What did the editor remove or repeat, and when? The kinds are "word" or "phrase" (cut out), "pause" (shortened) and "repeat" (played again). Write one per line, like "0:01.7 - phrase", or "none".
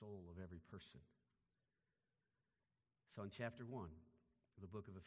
none